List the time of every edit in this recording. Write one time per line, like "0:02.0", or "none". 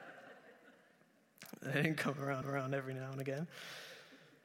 0:02.4